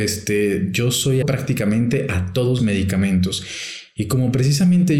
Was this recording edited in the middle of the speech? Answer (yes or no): yes